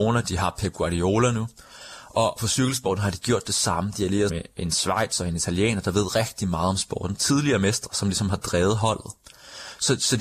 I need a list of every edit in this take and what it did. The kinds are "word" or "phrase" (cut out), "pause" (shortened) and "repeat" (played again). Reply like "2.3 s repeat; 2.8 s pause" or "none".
2.4 s word; 4.3 s word